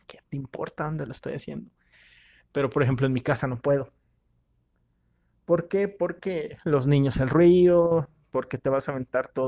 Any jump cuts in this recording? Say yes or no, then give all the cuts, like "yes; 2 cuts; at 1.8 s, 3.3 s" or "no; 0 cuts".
no; 0 cuts